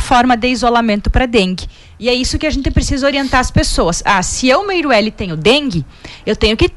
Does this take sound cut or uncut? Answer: uncut